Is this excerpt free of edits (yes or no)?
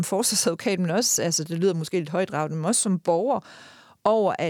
yes